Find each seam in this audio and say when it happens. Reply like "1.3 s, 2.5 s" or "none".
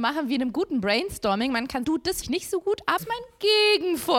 1.8 s, 2.2 s, 3.0 s

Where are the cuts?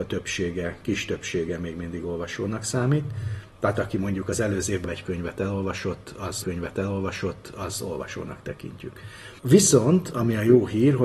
4.8 s, 6.4 s, 9.4 s

